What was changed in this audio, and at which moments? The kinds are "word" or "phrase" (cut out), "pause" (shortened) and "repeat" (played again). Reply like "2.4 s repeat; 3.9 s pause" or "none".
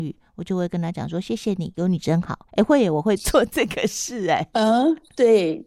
2.5 s pause